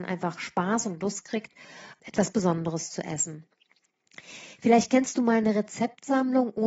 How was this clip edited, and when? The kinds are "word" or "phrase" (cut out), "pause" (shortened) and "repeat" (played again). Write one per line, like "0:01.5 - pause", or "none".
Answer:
0:02.0 - word